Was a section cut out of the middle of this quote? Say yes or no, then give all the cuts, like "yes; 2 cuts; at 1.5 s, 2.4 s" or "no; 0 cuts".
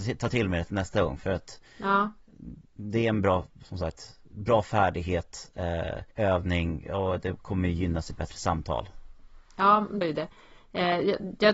yes; 3 cuts; at 2.7 s, 6.1 s, 10.0 s